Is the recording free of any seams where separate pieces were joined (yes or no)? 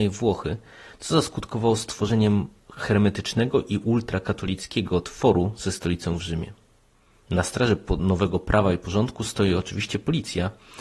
yes